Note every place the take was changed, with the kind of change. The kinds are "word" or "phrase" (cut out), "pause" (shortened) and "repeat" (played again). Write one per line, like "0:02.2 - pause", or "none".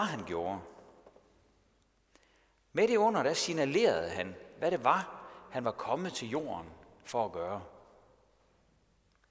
none